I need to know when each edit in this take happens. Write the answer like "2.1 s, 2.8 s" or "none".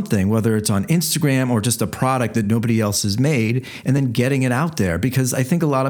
none